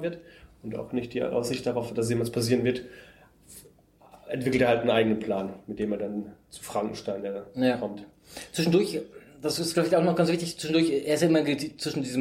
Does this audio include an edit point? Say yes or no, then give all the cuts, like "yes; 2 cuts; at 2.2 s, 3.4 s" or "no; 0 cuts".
no; 0 cuts